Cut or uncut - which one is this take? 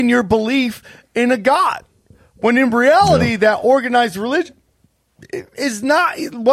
uncut